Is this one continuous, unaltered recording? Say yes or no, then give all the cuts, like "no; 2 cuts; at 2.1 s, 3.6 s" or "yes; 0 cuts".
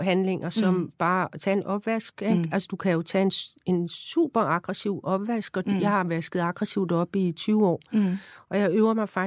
yes; 0 cuts